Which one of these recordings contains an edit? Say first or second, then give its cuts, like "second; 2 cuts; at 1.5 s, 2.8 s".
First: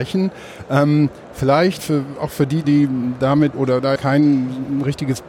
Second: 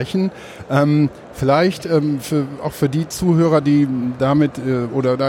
first; 4 cuts; at 1.8 s, 2.6 s, 3.5 s, 4.0 s